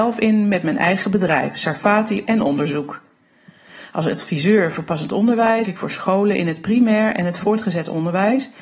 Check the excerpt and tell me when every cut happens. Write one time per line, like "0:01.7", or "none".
0:02.3
0:05.6